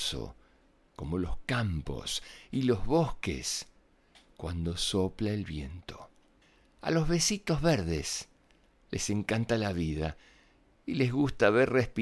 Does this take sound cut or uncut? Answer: uncut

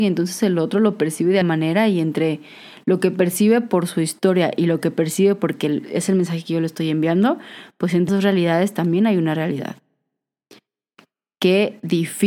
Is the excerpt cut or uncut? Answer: cut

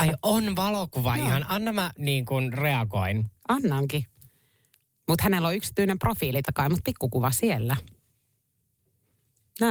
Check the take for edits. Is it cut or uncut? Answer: cut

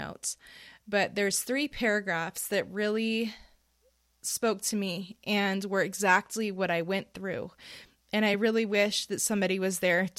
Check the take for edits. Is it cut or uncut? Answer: uncut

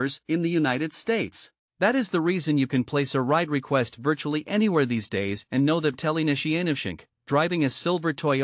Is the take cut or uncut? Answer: cut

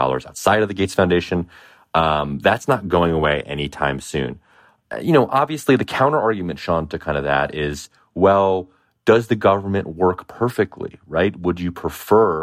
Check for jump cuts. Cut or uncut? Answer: uncut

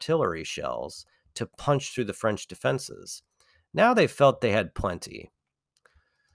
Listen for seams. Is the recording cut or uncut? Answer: uncut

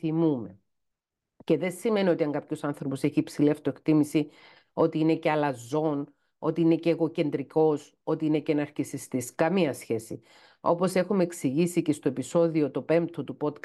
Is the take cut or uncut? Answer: uncut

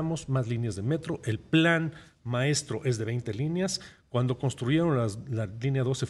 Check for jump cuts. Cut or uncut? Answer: uncut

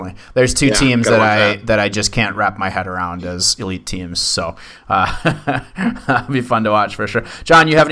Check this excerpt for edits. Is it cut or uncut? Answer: uncut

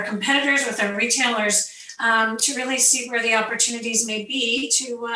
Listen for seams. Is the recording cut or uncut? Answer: uncut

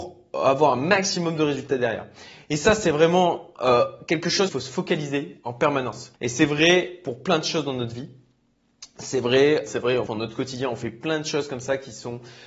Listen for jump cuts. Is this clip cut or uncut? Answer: cut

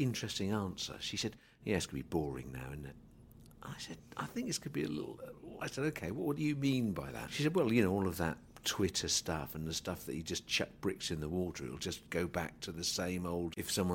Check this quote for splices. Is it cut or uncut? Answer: uncut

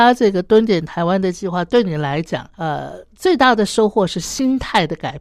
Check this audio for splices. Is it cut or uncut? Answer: cut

